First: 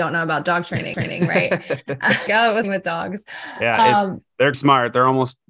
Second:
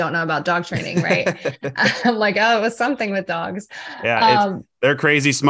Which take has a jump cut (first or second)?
first